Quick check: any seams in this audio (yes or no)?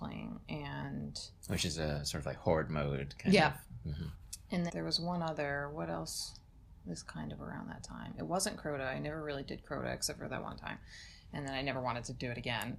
yes